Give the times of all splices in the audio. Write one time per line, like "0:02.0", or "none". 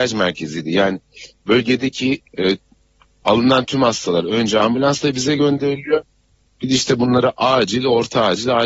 0:02.3